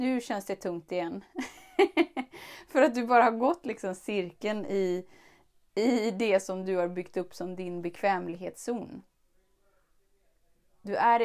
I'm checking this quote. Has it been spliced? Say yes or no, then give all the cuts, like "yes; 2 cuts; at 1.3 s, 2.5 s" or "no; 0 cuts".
no; 0 cuts